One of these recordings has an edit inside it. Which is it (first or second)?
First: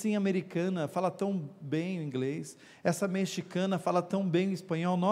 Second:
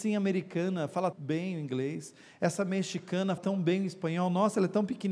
second